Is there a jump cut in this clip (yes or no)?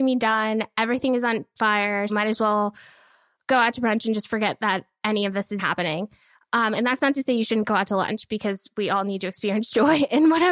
yes